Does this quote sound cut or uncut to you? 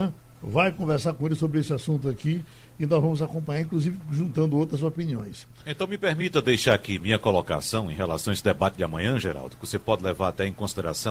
uncut